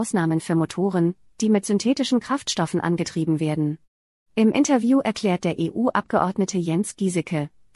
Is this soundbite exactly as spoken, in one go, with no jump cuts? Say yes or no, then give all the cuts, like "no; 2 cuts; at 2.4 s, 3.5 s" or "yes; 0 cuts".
yes; 0 cuts